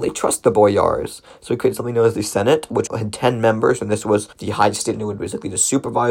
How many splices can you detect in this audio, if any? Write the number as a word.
three